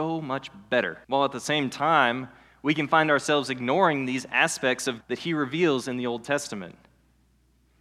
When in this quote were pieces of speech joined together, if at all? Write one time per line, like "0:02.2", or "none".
0:01.0
0:05.0